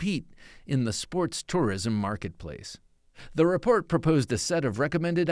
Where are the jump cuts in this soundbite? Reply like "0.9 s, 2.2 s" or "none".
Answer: none